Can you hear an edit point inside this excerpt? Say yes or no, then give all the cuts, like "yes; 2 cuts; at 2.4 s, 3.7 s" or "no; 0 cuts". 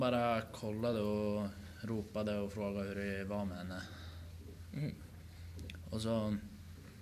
no; 0 cuts